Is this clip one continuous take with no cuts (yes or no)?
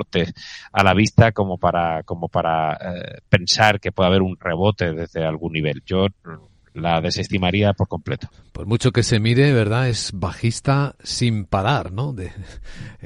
yes